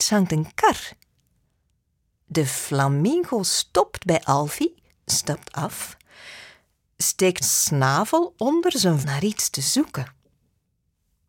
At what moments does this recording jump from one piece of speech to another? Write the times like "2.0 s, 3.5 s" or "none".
4.9 s, 7.4 s, 9.0 s